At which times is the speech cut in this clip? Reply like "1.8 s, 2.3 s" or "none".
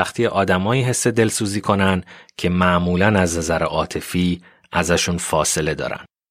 none